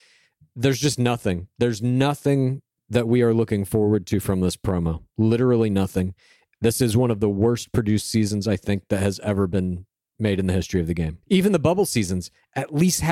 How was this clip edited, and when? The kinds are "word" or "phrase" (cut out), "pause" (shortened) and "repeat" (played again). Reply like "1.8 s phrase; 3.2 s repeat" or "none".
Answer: 11.2 s pause